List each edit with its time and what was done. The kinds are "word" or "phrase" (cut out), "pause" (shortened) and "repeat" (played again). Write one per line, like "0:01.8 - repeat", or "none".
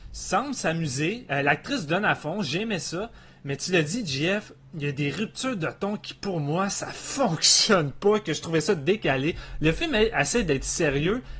none